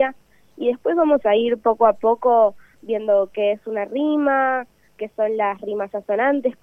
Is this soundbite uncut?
yes; 0 cuts

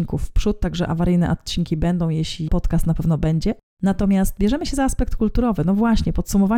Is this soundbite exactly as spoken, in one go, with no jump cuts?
no; 2 cuts; at 2.5 s, 3.7 s

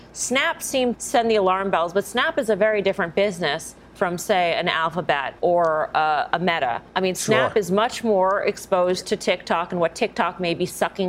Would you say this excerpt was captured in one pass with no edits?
no; 3 cuts; at 0.9 s, 5.4 s, 6.9 s

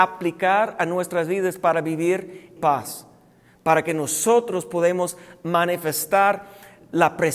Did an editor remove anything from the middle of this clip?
yes; 1 cut; at 2.6 s

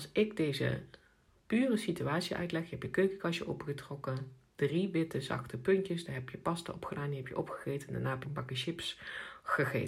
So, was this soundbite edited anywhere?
yes; 1 cut; at 8.2 s

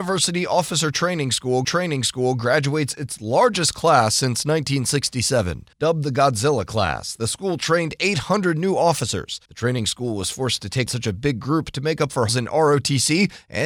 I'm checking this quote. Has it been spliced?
yes; 5 cuts; at 1.6 s, 5.7 s, 9.4 s, 10.9 s, 12.3 s

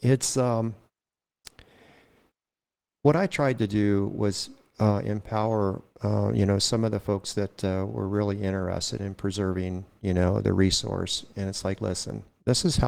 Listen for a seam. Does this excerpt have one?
no; 0 cuts

